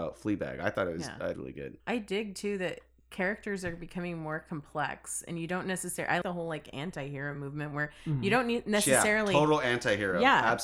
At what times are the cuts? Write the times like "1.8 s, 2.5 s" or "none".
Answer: 1.3 s, 1.8 s, 6.2 s